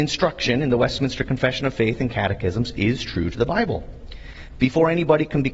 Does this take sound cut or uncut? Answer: uncut